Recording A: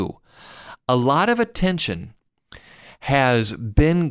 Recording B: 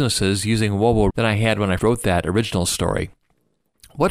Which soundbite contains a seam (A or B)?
B